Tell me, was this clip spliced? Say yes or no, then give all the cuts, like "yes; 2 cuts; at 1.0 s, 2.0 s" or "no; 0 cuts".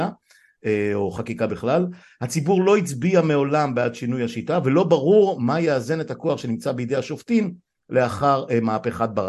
no; 0 cuts